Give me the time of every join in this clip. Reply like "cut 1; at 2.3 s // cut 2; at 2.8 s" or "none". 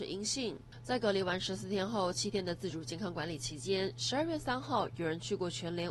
none